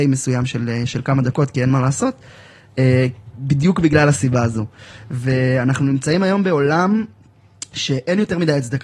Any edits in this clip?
no; 0 cuts

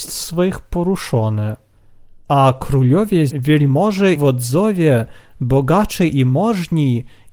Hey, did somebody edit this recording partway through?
yes; 2 cuts; at 3.3 s, 4.1 s

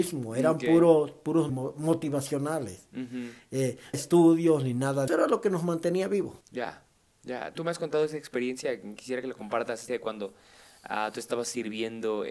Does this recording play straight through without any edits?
no; 6 cuts; at 1.5 s, 3.9 s, 5.1 s, 6.4 s, 7.5 s, 9.9 s

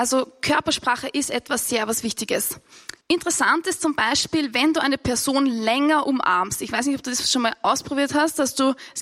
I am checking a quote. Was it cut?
yes; 1 cut; at 3.0 s

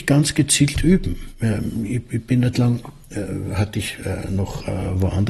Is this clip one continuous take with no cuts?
no; 1 cut; at 2.5 s

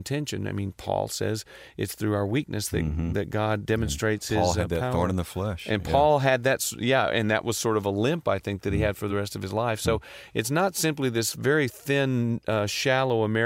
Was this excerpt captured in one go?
yes; 0 cuts

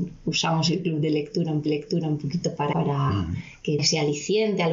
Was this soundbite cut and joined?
yes; 3 cuts; at 1.7 s, 2.7 s, 3.8 s

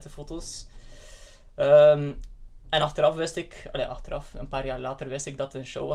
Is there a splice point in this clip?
no; 0 cuts

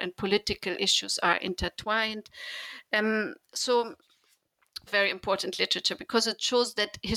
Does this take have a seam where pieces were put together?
yes; 1 cut; at 4.9 s

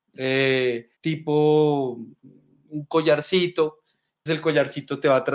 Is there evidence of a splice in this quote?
yes; 2 cuts; at 1.0 s, 4.3 s

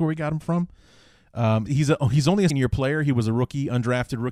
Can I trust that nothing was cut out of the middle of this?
no; 2 cuts; at 1.7 s, 2.5 s

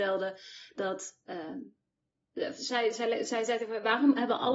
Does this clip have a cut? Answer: no; 0 cuts

